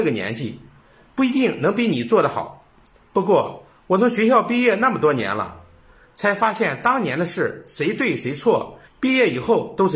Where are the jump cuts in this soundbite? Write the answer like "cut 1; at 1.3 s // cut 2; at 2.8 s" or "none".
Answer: cut 1; at 8.9 s

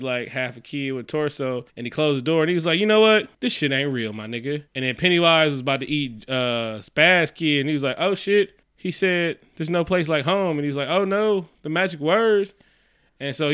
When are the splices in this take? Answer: cut 1; at 1.7 s // cut 2; at 3.3 s // cut 3; at 4.7 s // cut 4; at 8.6 s

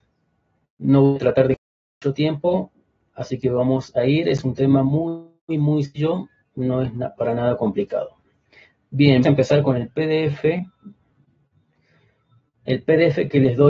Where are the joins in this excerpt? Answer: cut 1; at 5.4 s // cut 2; at 6.4 s // cut 3; at 9.2 s

